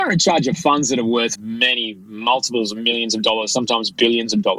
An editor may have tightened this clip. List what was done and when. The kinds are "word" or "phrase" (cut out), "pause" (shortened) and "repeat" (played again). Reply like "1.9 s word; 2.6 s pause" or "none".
1.4 s word